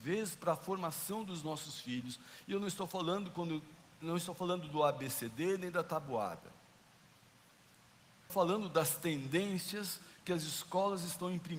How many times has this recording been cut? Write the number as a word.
one